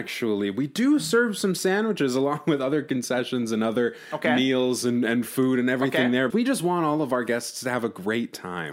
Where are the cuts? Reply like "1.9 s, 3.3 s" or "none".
6.3 s